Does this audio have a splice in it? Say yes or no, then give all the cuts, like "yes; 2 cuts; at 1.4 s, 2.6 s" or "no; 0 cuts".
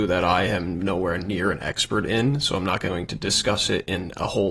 no; 0 cuts